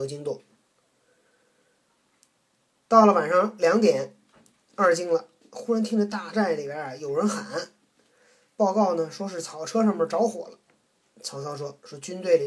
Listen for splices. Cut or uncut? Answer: uncut